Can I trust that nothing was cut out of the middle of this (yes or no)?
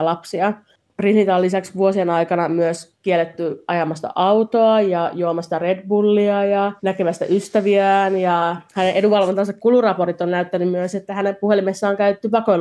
no